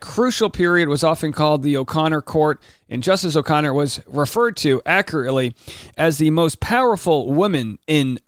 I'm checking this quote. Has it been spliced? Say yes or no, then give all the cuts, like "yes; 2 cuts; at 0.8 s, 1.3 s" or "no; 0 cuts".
no; 0 cuts